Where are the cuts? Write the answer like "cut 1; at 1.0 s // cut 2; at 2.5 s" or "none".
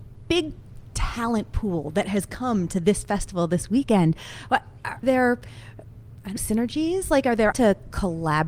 cut 1; at 5.0 s // cut 2; at 6.4 s // cut 3; at 7.5 s